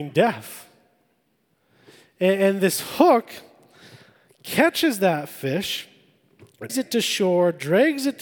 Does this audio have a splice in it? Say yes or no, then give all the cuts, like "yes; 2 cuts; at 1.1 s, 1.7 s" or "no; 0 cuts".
yes; 1 cut; at 6.7 s